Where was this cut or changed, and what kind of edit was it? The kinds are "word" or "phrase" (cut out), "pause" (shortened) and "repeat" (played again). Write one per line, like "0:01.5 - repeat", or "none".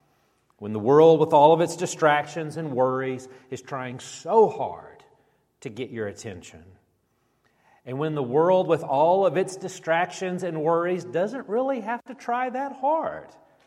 none